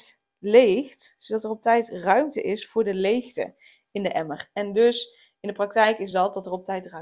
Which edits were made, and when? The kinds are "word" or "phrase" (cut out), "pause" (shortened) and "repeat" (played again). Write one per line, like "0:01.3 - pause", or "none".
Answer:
none